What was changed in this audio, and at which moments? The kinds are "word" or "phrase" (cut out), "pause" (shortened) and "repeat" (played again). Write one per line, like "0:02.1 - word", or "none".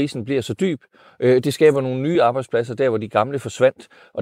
none